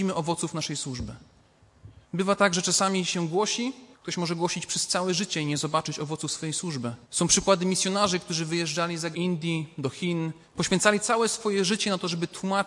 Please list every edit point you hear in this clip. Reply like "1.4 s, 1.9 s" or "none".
2.0 s, 3.9 s, 7.0 s, 9.1 s, 10.4 s